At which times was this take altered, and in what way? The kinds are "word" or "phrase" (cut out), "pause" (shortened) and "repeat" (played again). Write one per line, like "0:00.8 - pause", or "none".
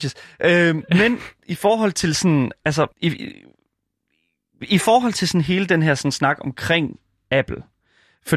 0:02.9 - pause